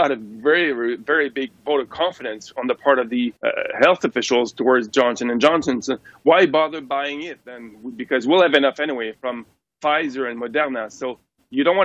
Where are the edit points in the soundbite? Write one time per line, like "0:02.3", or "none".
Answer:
0:03.4